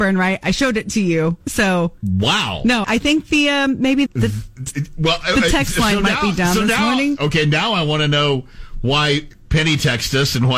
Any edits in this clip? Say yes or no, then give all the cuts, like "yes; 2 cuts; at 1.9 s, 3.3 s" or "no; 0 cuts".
yes; 3 cuts; at 1.4 s, 2.8 s, 4.1 s